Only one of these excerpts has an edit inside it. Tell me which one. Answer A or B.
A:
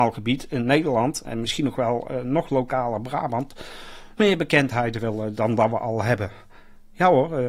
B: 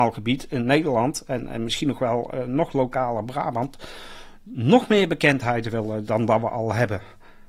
A